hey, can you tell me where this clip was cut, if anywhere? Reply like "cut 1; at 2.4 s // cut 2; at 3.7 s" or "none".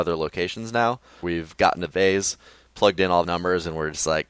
cut 1; at 1.2 s // cut 2; at 1.9 s // cut 3; at 3.2 s